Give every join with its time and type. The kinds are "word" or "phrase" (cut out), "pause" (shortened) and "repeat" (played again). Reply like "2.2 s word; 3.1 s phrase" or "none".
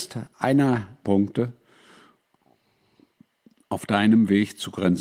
1.0 s phrase